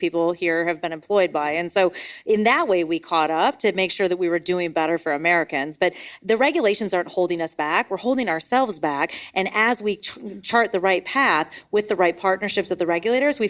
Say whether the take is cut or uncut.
uncut